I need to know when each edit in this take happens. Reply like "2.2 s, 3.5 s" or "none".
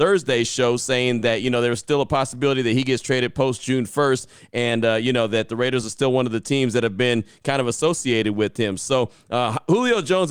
none